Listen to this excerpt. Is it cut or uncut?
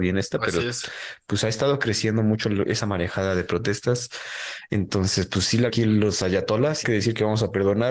cut